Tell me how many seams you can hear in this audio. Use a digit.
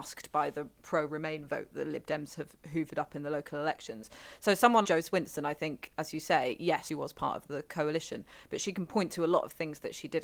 3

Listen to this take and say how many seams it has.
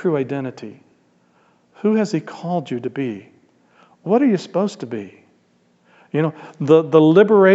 0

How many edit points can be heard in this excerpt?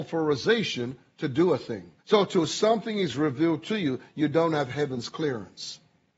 1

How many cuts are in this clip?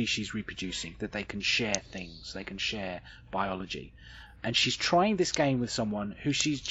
0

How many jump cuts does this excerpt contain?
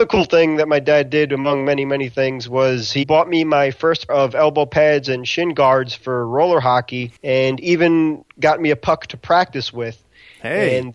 2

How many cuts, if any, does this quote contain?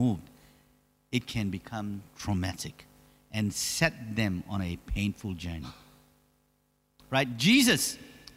1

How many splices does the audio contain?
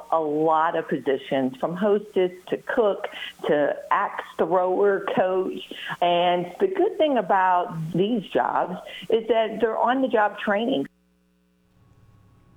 1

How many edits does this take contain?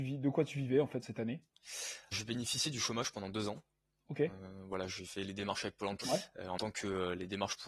4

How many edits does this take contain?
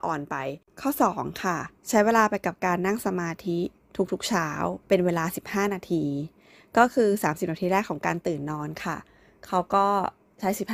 2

